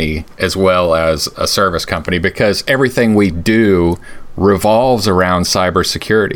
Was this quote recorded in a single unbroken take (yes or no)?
yes